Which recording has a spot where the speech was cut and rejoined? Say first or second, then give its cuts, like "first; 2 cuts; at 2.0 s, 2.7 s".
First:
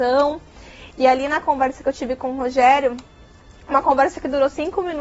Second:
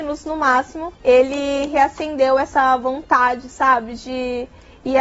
second; 1 cut; at 1.0 s